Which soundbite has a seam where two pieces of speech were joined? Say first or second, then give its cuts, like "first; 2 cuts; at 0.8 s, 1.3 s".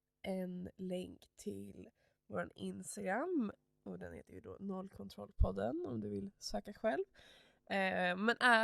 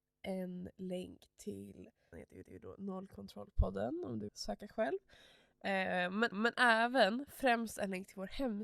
second; 4 cuts; at 2.1 s, 2.4 s, 4.3 s, 6.3 s